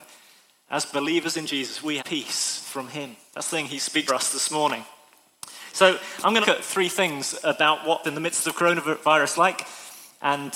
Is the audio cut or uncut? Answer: cut